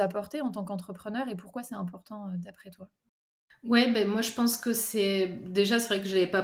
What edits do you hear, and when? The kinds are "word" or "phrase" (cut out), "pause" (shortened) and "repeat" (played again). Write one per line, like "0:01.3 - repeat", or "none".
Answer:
none